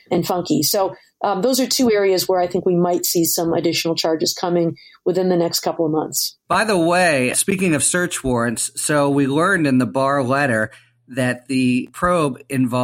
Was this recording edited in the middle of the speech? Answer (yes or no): no